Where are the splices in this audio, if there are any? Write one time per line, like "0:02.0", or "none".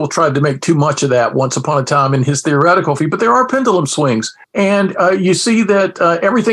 0:03.0
0:04.4